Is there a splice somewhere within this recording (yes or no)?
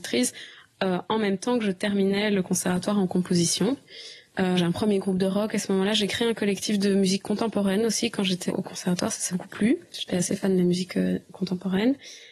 yes